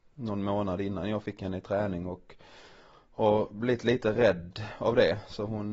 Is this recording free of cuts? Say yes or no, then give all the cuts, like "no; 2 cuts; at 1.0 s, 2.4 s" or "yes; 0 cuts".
yes; 0 cuts